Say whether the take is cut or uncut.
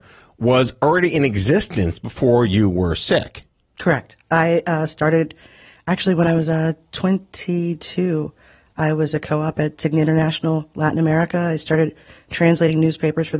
uncut